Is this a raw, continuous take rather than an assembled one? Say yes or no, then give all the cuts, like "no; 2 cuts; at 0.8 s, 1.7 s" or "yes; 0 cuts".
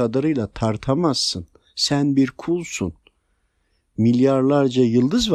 yes; 0 cuts